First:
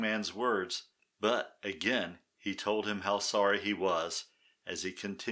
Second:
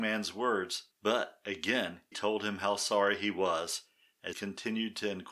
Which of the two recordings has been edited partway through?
second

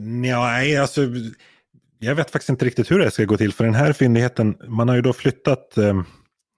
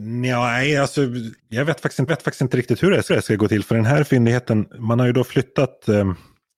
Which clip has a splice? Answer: second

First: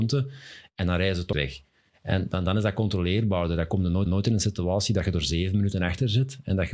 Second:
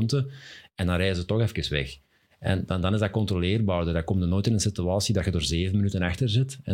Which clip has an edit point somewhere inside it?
first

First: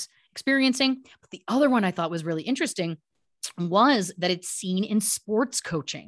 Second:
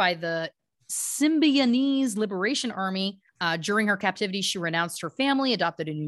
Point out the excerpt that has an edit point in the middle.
second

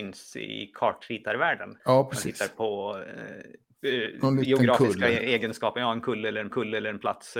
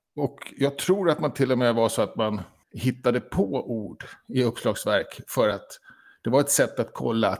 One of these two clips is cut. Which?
first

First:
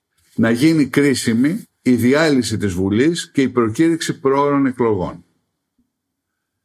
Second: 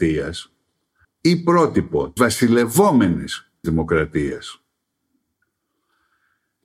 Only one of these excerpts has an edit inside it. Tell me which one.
second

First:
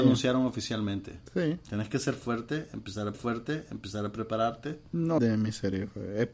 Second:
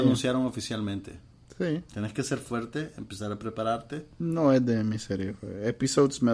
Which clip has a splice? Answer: first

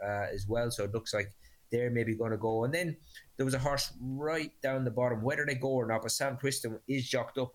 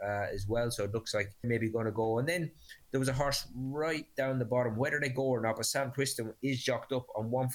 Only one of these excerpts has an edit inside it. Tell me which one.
second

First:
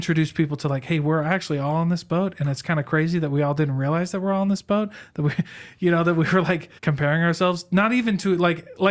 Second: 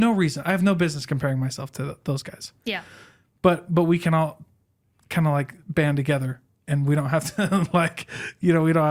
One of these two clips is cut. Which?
first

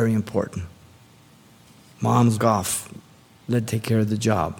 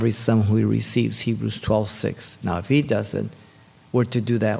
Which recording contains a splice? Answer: first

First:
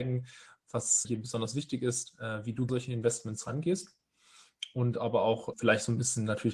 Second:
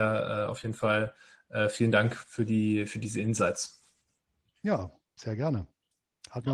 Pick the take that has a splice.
first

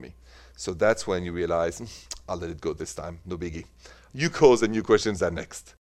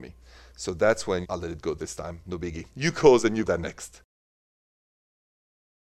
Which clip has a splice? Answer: second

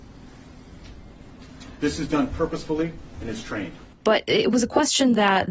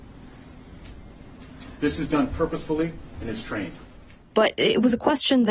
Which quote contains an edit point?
first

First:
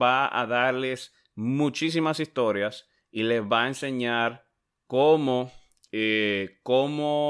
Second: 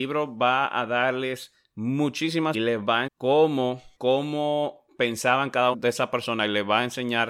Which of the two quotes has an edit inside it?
second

